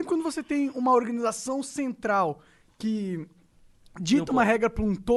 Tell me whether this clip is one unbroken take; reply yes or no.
yes